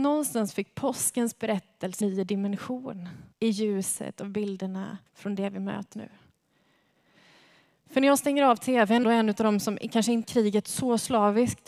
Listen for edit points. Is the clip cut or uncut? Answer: cut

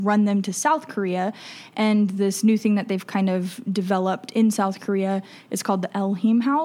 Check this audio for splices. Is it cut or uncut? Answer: uncut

